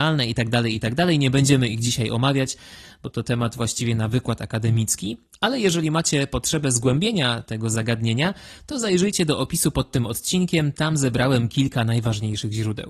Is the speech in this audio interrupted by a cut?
no; 0 cuts

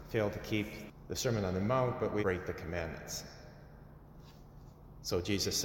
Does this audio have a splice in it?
yes; 1 cut; at 2.2 s

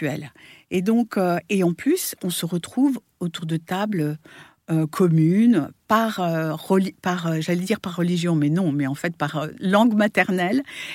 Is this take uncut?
yes; 0 cuts

